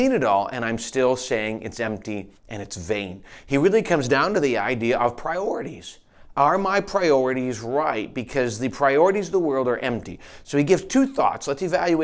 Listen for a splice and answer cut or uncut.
cut